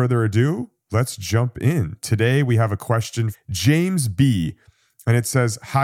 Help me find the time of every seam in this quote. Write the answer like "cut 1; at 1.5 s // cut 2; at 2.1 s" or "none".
cut 1; at 3.3 s